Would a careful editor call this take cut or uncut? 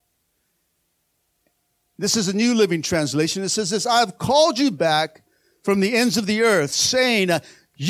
uncut